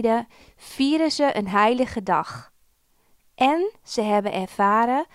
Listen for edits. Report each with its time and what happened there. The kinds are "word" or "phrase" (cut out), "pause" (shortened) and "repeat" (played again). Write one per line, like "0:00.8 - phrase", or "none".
none